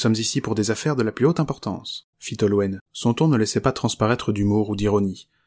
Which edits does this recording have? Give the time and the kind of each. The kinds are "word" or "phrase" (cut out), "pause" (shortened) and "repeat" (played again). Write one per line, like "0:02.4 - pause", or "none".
0:02.1 - pause
0:02.9 - pause